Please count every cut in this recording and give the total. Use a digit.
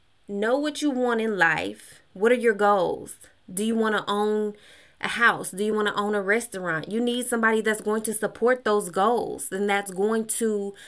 0